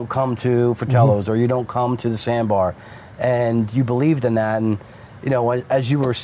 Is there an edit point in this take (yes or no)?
no